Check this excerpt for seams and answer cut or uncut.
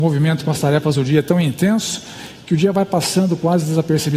uncut